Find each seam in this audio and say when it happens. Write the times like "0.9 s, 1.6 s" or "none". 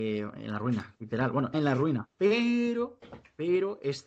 1.5 s